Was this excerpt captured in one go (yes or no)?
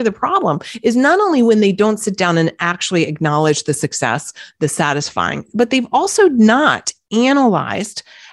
yes